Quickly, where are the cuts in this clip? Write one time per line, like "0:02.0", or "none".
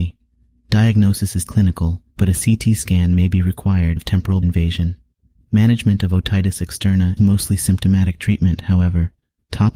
0:01.5
0:02.1
0:04.0
0:04.4
0:07.2